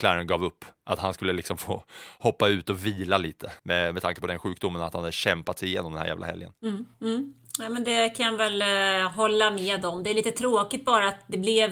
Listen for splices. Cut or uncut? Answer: cut